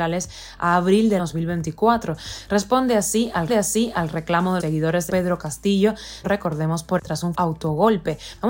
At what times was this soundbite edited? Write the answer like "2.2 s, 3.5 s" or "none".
1.2 s, 3.5 s, 4.6 s, 5.1 s, 6.2 s, 7.0 s, 7.3 s